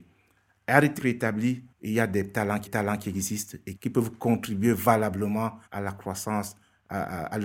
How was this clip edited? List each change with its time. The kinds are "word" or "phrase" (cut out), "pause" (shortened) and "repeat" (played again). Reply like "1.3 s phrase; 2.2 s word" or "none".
1.0 s phrase; 1.7 s pause; 2.7 s repeat; 3.8 s phrase; 5.7 s pause